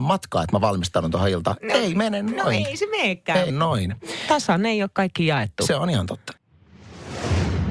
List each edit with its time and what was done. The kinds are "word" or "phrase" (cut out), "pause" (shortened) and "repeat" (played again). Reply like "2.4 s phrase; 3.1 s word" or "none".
3.5 s word